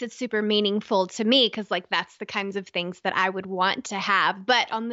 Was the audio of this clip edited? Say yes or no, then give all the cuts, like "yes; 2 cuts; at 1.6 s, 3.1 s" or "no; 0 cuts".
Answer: no; 0 cuts